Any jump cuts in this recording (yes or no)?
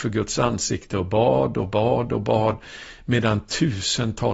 no